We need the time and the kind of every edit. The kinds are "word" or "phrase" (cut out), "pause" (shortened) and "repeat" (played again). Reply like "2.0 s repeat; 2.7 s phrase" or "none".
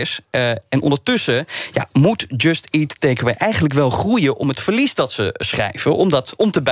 none

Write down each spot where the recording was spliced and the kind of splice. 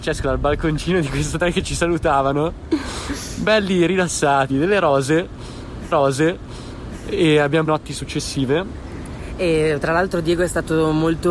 4.5 s word; 5.9 s repeat; 7.7 s phrase

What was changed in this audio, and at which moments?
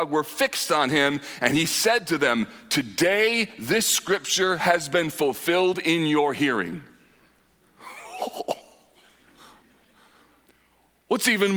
none

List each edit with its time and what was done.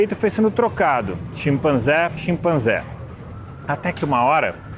2.2 s word

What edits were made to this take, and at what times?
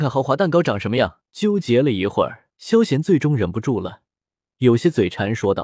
1.3 s pause; 2.5 s pause

